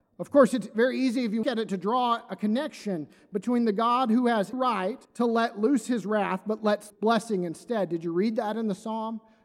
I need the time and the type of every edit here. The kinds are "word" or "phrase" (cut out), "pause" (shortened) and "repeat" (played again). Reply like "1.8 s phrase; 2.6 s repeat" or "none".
1.4 s word; 4.5 s word; 5.0 s pause; 6.9 s word